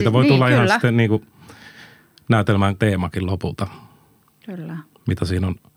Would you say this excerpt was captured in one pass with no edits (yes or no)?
no